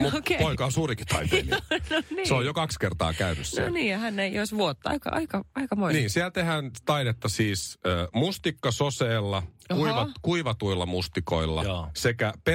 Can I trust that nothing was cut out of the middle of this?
yes; 0 cuts

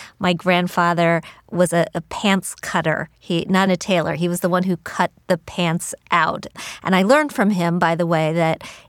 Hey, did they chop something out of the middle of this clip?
yes; 1 cut; at 3.7 s

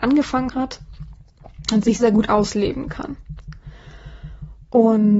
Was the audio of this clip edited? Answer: yes; 1 cut; at 2.0 s

